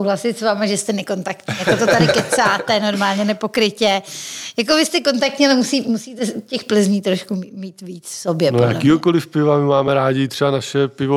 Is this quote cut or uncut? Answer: uncut